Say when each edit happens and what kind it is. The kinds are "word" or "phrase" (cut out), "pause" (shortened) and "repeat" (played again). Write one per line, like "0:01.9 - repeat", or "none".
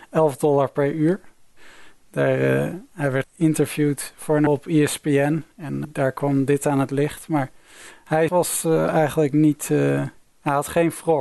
0:03.2 - word
0:04.5 - word
0:05.8 - word
0:08.3 - word